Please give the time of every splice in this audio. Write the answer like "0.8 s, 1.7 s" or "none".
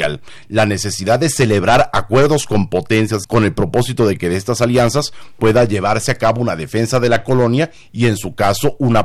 3.2 s